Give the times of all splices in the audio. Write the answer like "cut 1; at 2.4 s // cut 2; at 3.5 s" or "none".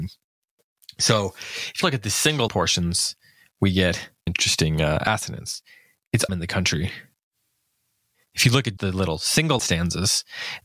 cut 1; at 1.8 s // cut 2; at 2.5 s // cut 3; at 4.3 s // cut 4; at 6.3 s // cut 5; at 8.8 s // cut 6; at 9.6 s